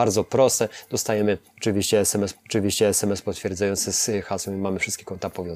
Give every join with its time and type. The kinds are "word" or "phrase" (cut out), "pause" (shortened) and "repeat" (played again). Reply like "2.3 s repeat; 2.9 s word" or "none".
2.3 s repeat

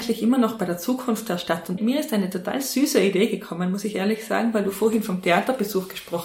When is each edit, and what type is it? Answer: 1.8 s word

